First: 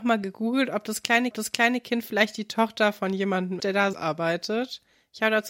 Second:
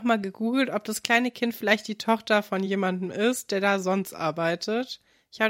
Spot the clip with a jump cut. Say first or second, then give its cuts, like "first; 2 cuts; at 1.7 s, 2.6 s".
first; 3 cuts; at 1.3 s, 3.6 s, 3.9 s